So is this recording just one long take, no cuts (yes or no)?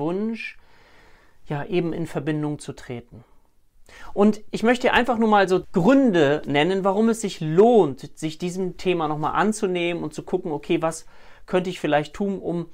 no